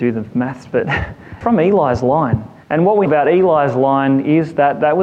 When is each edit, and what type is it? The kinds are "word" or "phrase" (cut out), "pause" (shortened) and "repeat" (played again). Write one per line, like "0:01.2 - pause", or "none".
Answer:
0:01.4 - phrase
0:02.6 - pause
0:03.1 - word